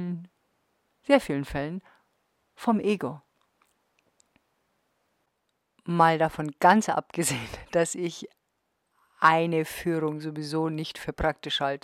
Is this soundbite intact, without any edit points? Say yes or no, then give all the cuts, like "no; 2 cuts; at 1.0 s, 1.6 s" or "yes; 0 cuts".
yes; 0 cuts